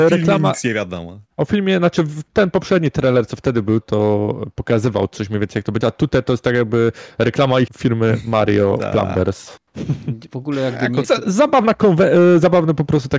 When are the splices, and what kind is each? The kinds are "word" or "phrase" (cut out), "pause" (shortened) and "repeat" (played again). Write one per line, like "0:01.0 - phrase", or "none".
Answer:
0:03.8 - word
0:05.8 - word
0:07.7 - word
0:11.0 - phrase